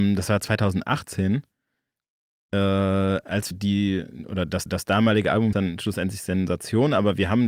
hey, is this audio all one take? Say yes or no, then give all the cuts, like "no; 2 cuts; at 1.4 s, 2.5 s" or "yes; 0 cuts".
no; 3 cuts; at 3.5 s, 4.7 s, 5.5 s